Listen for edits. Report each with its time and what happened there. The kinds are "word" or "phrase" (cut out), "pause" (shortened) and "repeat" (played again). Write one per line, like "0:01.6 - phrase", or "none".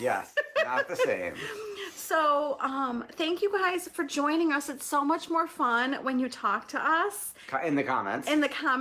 none